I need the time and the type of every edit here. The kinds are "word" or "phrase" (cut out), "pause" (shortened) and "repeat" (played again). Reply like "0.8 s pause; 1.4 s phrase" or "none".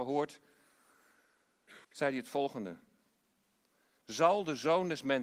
1.8 s pause